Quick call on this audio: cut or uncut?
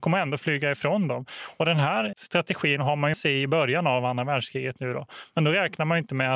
cut